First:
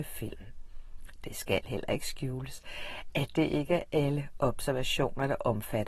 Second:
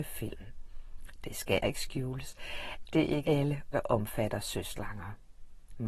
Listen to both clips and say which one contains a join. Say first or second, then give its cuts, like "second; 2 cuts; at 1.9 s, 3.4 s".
second; 4 cuts; at 1.6 s, 2.9 s, 3.2 s, 3.7 s